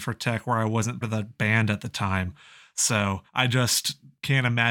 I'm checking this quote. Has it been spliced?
yes; 2 cuts; at 1.0 s, 3.3 s

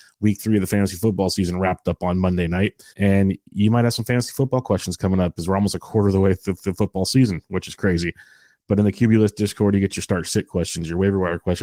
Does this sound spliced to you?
yes; 2 cuts; at 2.9 s, 6.6 s

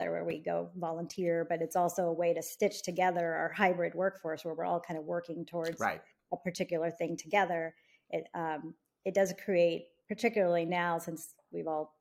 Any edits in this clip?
no; 0 cuts

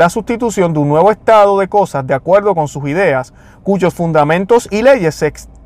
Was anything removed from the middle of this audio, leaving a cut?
no; 0 cuts

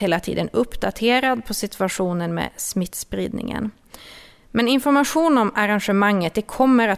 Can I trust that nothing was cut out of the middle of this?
yes; 0 cuts

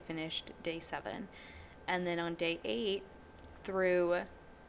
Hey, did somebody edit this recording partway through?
no; 0 cuts

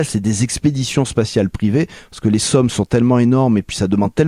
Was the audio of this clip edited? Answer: no; 0 cuts

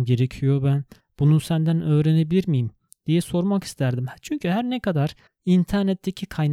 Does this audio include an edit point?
no; 0 cuts

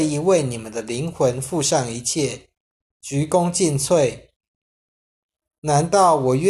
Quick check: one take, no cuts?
yes; 0 cuts

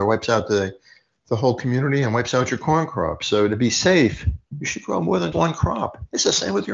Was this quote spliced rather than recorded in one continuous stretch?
yes; 1 cut; at 5.3 s

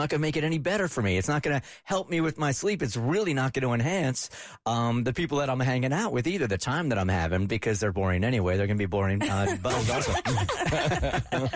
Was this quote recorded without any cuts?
yes; 0 cuts

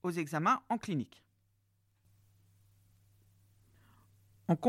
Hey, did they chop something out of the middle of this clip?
no; 0 cuts

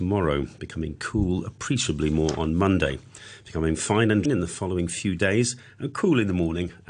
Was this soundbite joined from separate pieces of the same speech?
yes; 1 cut; at 4.2 s

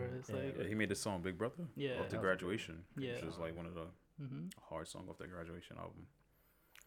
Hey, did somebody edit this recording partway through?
no; 0 cuts

